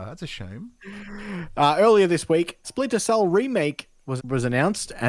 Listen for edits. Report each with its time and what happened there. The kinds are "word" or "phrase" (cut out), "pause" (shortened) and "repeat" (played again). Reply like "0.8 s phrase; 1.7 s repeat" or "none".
2.6 s word; 4.2 s word